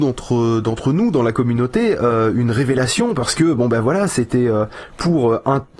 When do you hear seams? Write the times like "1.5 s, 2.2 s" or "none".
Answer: none